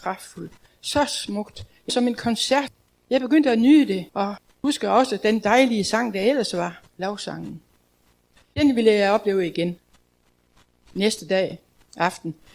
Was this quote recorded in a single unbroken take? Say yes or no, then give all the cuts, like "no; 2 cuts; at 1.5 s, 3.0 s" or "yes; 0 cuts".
no; 4 cuts; at 1.9 s, 2.9 s, 4.1 s, 6.9 s